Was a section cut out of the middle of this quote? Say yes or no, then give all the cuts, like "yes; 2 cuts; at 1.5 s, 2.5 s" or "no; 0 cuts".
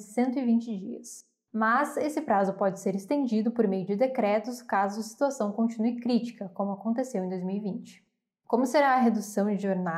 no; 0 cuts